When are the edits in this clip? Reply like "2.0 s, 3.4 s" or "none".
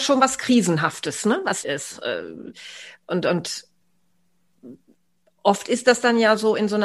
1.6 s